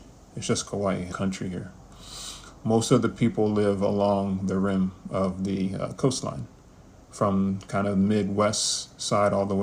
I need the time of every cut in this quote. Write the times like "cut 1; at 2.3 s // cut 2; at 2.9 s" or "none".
cut 1; at 1.1 s